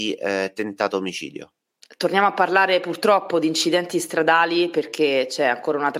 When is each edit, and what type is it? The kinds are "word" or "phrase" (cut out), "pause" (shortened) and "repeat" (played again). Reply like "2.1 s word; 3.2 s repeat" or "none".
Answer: none